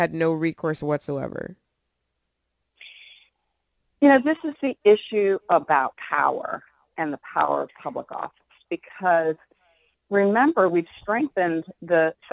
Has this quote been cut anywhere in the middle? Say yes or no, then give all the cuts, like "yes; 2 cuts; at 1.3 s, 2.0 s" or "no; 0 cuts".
no; 0 cuts